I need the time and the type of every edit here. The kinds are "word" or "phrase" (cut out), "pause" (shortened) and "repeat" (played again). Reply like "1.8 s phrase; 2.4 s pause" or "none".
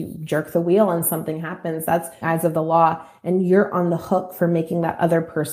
2.2 s phrase